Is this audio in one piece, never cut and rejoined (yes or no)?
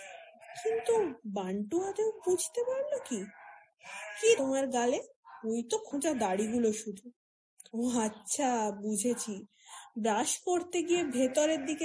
no